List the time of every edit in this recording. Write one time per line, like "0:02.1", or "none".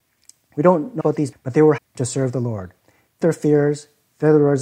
0:01.0
0:01.3
0:01.8
0:03.2